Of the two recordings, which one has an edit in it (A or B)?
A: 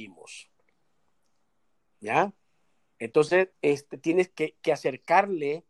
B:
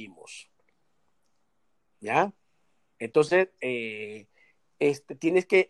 A